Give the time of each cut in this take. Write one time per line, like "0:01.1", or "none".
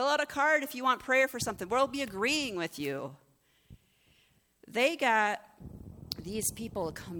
none